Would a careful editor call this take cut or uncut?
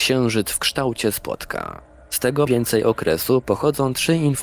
cut